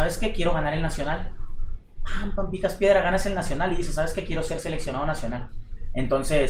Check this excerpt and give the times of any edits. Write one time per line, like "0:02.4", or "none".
none